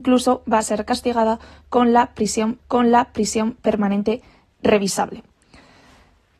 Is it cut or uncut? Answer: cut